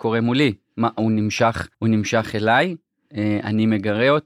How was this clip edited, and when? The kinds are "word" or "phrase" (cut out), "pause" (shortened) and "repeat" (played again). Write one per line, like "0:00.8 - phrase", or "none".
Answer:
0:01.7 - pause

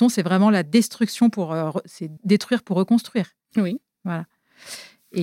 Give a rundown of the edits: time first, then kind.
0:02.2 - word

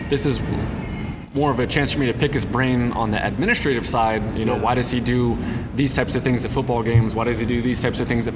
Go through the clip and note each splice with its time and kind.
none

